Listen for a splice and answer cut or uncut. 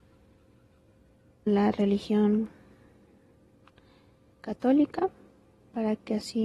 cut